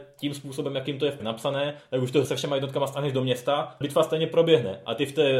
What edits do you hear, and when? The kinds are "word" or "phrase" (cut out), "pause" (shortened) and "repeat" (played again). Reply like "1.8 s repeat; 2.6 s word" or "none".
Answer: 1.2 s word; 2.2 s phrase; 3.8 s word